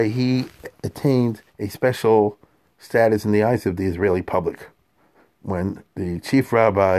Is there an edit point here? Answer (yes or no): yes